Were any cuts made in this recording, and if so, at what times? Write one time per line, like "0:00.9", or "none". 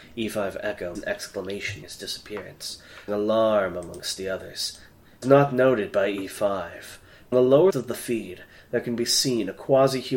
0:00.9
0:01.8
0:03.1
0:05.2
0:07.3
0:07.7